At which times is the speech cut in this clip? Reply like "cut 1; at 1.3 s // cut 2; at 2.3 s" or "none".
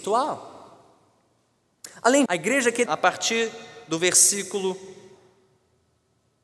cut 1; at 2.3 s // cut 2; at 2.9 s